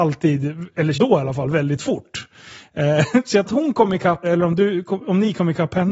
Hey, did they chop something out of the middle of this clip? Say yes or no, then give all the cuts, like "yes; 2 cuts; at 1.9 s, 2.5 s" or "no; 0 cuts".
yes; 3 cuts; at 0.9 s, 3.5 s, 4.2 s